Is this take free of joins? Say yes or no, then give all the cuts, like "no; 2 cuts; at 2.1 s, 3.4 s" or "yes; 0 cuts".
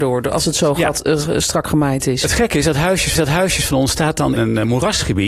no; 2 cuts; at 3.1 s, 4.4 s